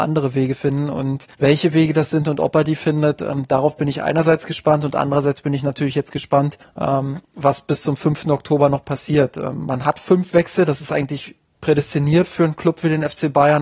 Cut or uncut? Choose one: cut